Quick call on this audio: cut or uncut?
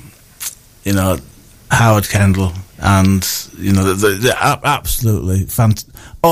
cut